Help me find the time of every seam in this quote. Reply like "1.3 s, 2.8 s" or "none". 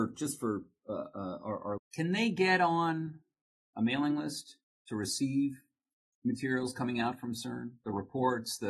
1.8 s